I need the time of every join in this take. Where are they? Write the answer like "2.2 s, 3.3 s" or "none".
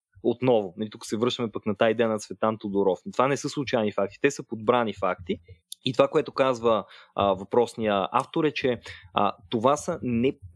5.6 s